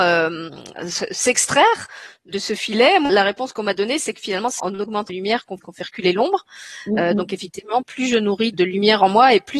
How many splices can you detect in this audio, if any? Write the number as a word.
seven